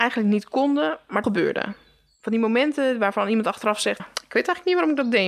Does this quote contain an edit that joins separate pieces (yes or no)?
yes